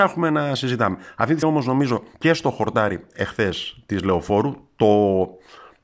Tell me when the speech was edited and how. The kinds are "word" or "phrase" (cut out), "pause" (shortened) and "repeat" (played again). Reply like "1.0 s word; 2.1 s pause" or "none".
1.4 s word; 2.1 s pause

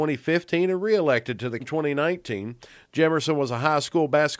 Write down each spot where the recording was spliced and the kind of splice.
1.6 s word

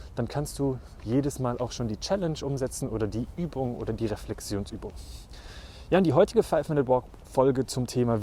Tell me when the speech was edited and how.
none

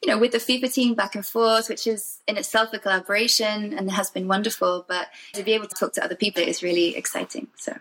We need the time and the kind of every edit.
5.3 s word; 5.7 s word; 6.4 s word

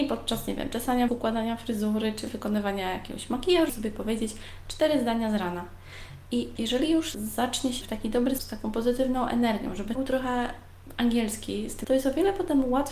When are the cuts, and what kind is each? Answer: 1.1 s word; 3.7 s word; 6.6 s word; 7.1 s word; 7.8 s word; 8.4 s word; 10.0 s word; 11.8 s word

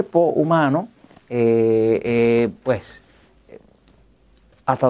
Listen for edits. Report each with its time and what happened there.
none

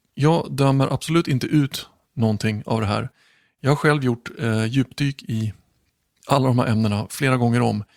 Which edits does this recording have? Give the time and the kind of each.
none

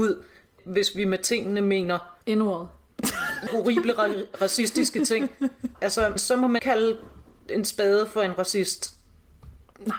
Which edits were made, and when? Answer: 2.2 s pause; 3.5 s phrase; 6.2 s word; 6.6 s word

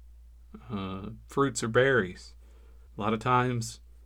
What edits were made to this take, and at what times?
2.9 s pause

